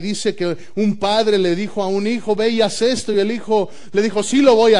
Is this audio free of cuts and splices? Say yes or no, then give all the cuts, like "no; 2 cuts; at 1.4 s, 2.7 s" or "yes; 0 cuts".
yes; 0 cuts